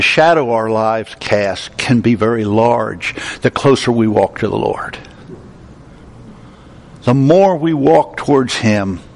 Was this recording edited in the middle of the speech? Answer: no; 0 cuts

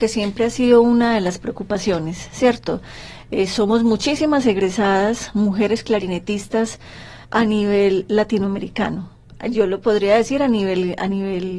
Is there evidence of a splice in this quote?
yes; 1 cut; at 7.2 s

